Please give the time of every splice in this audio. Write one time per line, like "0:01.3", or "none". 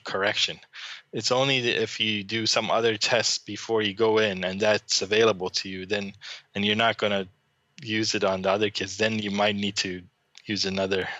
none

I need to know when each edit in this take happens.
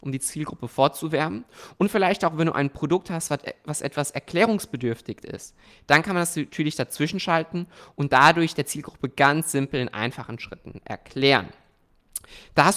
none

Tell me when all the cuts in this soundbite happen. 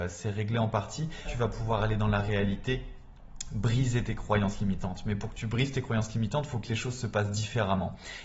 0:01.2

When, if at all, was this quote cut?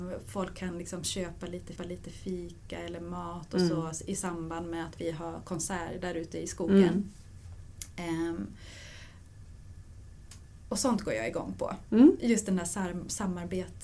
0:01.8

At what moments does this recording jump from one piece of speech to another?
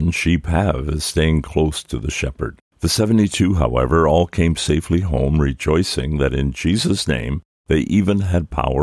0:02.7

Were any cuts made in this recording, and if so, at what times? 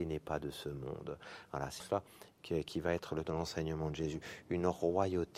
0:01.8
0:03.2

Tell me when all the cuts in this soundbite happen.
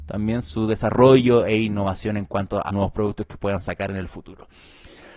0:02.7

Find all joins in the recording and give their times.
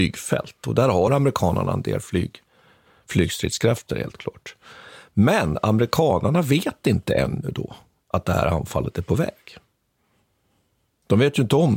none

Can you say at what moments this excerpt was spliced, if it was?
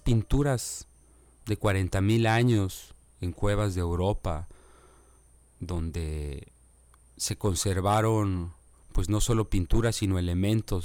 none

